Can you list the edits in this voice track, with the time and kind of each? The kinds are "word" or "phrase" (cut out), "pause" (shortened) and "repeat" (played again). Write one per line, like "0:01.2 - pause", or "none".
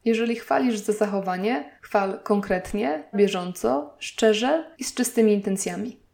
0:01.8 - pause
0:03.1 - word
0:04.7 - pause

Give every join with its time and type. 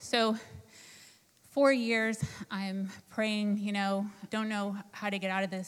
0:04.3 - word

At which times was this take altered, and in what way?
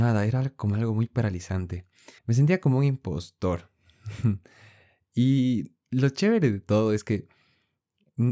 0:02.2 - pause

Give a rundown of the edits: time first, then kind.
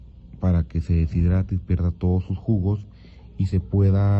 none

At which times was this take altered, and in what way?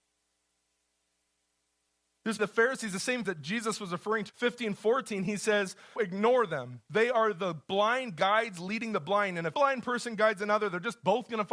0:02.4 - word
0:03.2 - word
0:04.3 - word
0:06.0 - word
0:09.5 - word

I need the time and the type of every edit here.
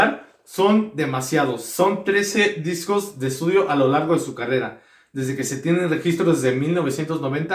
none

